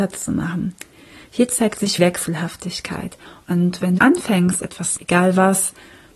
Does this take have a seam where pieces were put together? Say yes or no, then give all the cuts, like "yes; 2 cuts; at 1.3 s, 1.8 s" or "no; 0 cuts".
yes; 4 cuts; at 2.0 s, 3.3 s, 4.0 s, 5.0 s